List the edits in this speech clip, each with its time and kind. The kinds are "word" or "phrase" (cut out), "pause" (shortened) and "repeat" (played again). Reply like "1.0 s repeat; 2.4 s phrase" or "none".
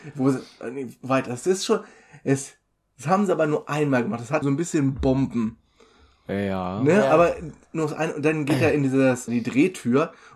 4.4 s word; 9.3 s word